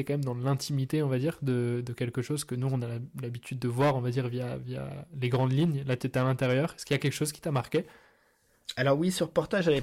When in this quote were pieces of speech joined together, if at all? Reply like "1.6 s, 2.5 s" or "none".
none